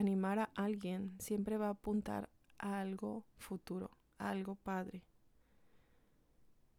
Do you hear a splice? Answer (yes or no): no